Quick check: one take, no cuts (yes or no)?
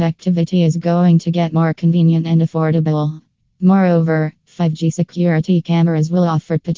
yes